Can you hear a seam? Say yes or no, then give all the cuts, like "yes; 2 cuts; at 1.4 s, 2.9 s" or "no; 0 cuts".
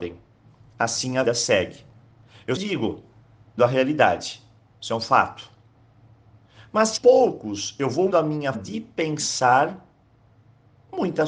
yes; 6 cuts; at 1.3 s, 2.6 s, 3.6 s, 7.0 s, 8.1 s, 8.5 s